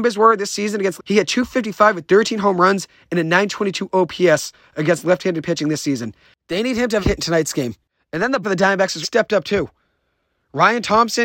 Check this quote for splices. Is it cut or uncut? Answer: cut